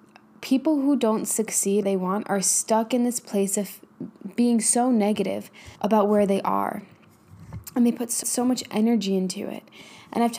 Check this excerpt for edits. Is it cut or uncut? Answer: cut